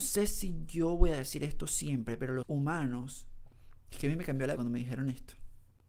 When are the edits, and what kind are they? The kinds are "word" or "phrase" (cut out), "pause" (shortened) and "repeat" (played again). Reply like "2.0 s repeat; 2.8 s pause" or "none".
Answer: 2.4 s word; 4.6 s word

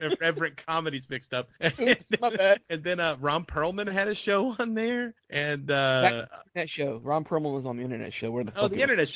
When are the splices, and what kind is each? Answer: 1.5 s pause; 2.6 s pause; 5.2 s pause

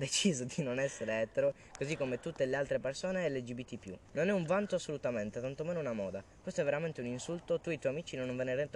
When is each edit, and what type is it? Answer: 4.1 s pause

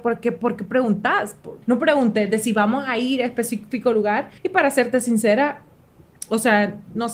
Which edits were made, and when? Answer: 1.6 s pause; 4.4 s pause

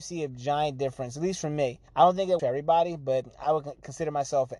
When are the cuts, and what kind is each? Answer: 1.9 s pause; 2.4 s word; 3.4 s word

